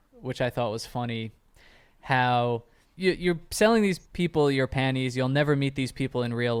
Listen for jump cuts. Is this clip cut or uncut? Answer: cut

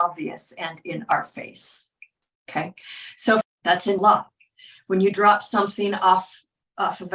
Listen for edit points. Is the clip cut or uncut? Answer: cut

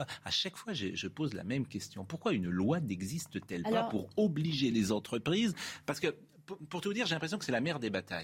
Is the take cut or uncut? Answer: uncut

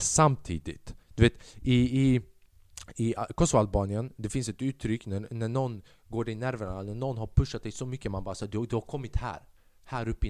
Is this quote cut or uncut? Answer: cut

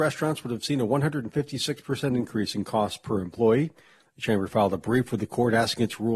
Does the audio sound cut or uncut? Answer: uncut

